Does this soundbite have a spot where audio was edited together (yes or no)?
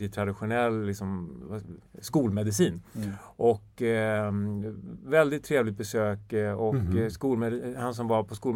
yes